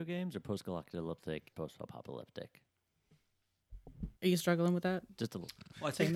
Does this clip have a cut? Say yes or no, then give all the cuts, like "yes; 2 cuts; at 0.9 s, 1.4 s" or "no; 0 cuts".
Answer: yes; 2 cuts; at 1.5 s, 4.2 s